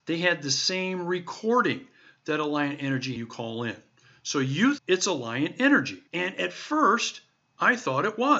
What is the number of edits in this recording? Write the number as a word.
three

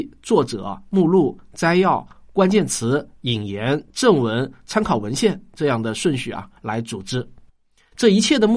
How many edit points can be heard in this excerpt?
one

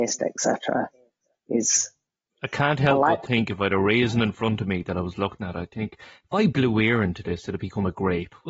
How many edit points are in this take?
zero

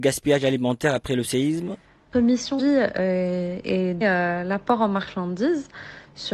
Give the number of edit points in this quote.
three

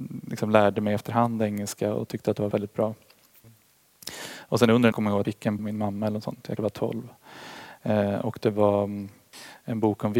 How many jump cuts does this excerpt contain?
five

